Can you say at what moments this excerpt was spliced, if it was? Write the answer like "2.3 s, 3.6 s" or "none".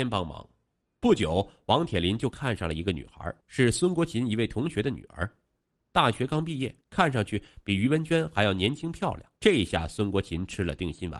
3.4 s, 6.8 s, 9.4 s